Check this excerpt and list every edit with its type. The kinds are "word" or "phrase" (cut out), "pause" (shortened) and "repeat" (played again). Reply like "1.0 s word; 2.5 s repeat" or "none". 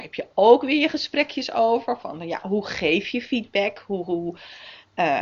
none